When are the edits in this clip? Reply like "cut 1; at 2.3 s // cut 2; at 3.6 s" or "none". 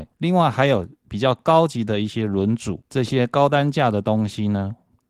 cut 1; at 1.0 s